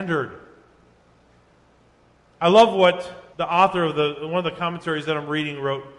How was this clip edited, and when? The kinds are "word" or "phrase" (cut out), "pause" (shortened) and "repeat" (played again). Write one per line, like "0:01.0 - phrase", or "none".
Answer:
0:03.3 - pause